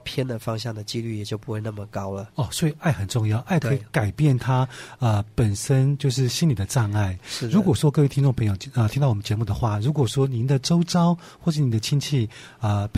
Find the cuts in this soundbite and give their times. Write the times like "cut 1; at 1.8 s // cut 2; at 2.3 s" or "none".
cut 1; at 2.3 s